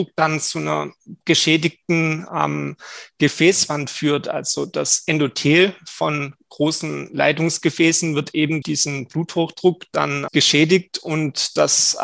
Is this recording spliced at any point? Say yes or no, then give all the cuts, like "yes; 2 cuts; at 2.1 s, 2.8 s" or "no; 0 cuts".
yes; 2 cuts; at 8.6 s, 10.3 s